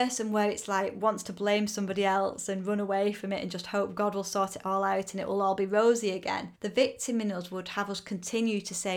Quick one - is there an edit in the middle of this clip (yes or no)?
yes